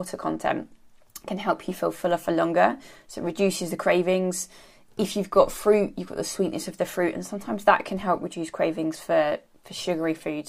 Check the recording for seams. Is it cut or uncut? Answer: uncut